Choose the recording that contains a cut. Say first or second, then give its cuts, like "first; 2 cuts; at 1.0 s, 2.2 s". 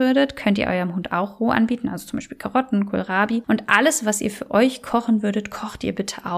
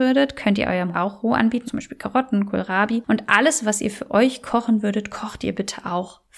second; 2 cuts; at 0.9 s, 1.7 s